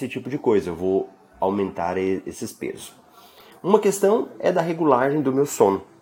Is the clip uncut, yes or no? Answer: yes